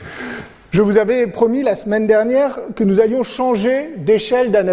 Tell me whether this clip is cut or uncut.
uncut